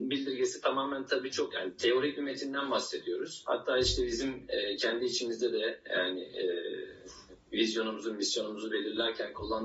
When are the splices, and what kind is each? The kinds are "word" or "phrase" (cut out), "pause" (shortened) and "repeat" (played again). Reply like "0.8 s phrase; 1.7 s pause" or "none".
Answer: none